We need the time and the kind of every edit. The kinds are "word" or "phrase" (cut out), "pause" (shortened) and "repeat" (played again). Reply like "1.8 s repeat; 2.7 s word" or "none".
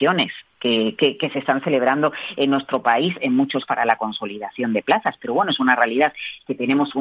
3.6 s word